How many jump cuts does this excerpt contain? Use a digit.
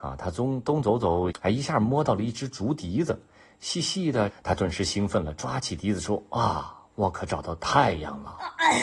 2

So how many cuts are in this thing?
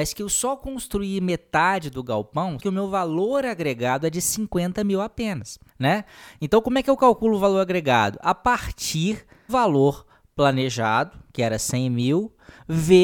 3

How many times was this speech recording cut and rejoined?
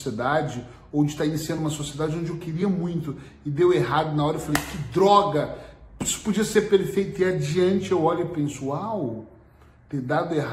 0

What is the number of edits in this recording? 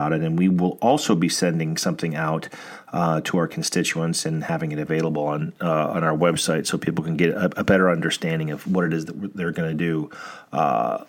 0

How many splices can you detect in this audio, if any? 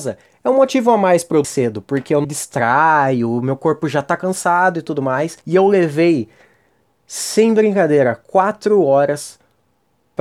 3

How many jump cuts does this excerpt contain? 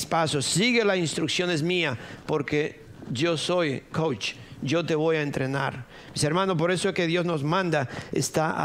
1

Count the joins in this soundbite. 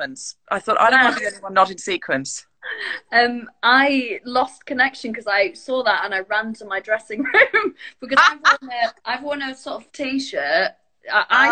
2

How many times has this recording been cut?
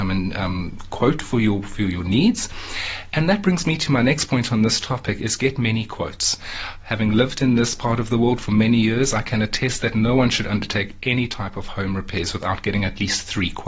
0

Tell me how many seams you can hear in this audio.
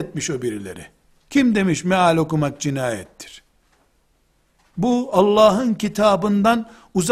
0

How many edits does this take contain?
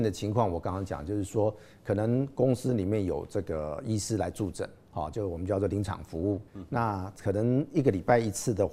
2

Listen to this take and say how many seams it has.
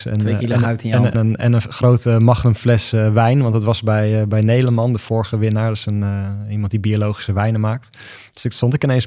1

